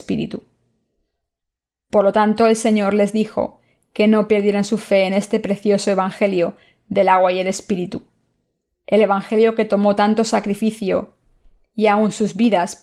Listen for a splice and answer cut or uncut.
uncut